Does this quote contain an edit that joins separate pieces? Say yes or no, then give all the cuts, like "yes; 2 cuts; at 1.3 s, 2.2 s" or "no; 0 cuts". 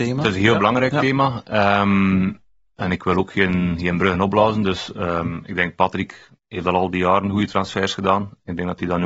yes; 1 cut; at 6.4 s